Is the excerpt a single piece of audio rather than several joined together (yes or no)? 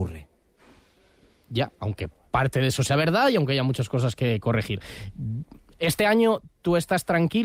yes